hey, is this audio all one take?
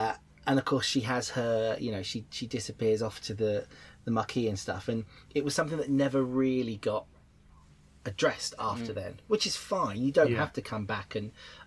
yes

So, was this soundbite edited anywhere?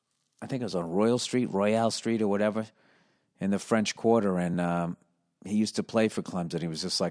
no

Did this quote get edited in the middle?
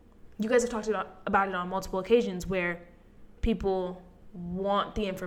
yes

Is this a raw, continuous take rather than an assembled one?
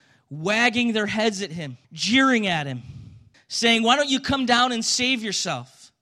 no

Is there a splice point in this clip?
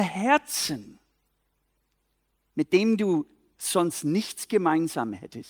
no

